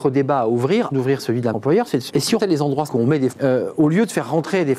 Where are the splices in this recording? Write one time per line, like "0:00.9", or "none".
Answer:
0:00.9
0:01.5
0:02.1
0:02.4
0:02.9
0:03.3